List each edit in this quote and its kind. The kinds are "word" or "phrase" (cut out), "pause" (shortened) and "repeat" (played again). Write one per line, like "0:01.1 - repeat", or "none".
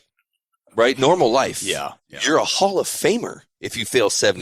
0:02.0 - pause

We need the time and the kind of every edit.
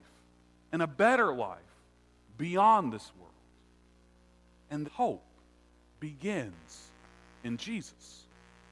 0:04.8 - word

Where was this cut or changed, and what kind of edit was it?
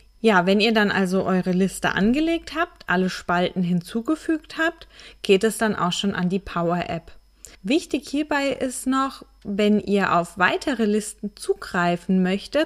0:07.5 - pause

